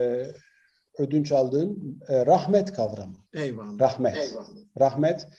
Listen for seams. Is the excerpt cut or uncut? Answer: cut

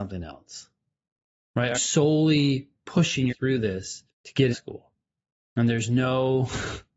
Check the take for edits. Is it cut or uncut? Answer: cut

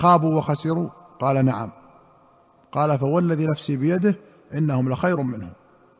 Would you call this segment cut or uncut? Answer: uncut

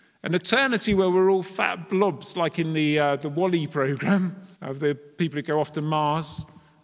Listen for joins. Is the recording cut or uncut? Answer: cut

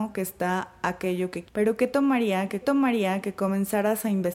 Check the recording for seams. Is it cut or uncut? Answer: cut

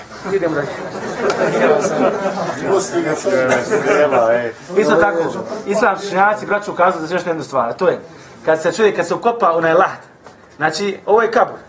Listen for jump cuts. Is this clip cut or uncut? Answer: uncut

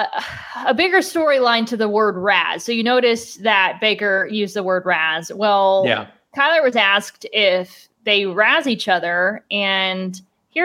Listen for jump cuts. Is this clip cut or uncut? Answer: uncut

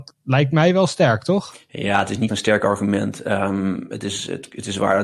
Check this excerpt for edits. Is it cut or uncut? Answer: cut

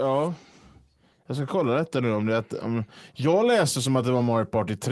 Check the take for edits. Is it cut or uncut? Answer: uncut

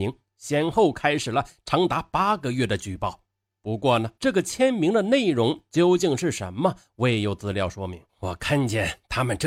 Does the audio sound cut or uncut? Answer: cut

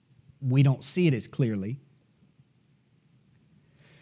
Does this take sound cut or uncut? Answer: uncut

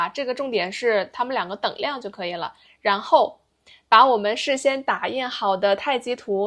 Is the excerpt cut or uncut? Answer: uncut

